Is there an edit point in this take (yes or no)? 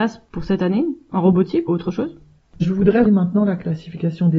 yes